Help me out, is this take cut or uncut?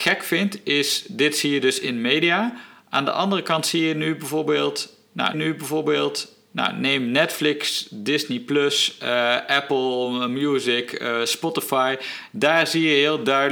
cut